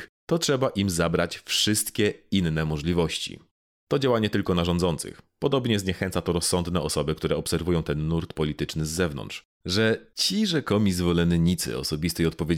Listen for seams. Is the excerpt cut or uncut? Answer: uncut